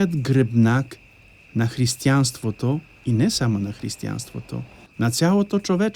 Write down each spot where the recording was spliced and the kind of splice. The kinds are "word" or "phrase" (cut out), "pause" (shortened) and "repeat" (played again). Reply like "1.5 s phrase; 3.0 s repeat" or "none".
none